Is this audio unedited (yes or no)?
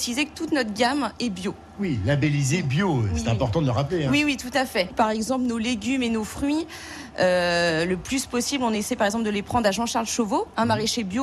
yes